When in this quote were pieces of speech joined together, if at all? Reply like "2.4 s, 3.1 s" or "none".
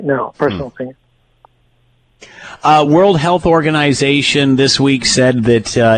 none